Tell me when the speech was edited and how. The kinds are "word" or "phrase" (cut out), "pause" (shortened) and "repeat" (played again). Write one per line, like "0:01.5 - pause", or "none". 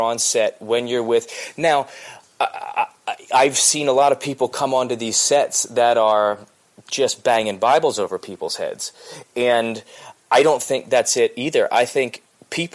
none